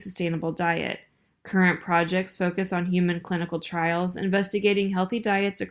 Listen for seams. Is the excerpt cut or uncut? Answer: uncut